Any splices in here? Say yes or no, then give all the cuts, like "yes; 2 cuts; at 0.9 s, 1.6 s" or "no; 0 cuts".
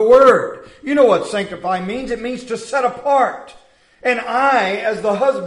no; 0 cuts